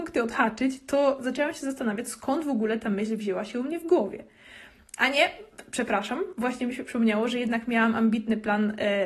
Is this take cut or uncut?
uncut